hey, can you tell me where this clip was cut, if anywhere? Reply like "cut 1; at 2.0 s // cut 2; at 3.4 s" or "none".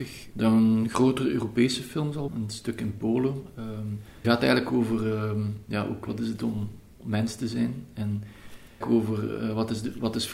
cut 1; at 2.3 s // cut 2; at 4.2 s // cut 3; at 6.1 s // cut 4; at 8.8 s